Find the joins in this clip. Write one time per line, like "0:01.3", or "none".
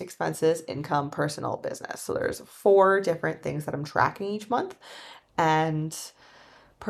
none